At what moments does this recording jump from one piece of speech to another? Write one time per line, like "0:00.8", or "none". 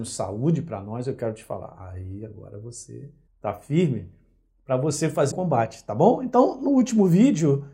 0:03.3
0:05.3